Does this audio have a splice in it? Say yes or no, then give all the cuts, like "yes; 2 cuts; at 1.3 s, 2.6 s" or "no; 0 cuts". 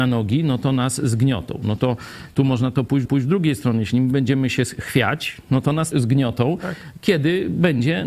yes; 2 cuts; at 3.1 s, 5.9 s